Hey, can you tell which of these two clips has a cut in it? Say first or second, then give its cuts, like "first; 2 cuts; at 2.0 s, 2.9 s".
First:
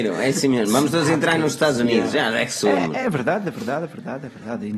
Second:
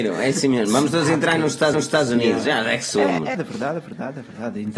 second; 2 cuts; at 1.7 s, 3.3 s